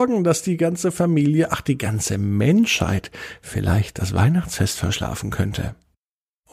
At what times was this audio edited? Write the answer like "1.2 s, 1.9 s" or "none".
none